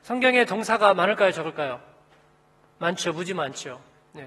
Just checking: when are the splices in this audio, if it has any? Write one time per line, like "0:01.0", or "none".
none